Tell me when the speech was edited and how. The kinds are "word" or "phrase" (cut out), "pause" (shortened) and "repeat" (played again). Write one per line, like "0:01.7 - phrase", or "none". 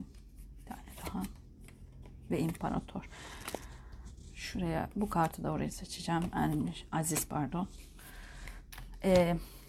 none